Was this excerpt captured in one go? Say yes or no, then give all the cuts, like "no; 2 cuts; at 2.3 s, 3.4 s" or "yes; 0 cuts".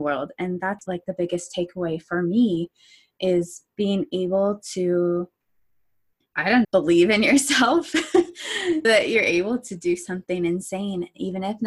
no; 2 cuts; at 6.6 s, 8.8 s